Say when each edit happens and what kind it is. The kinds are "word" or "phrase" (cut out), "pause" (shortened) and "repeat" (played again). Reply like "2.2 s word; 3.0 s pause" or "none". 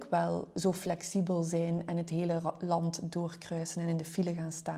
none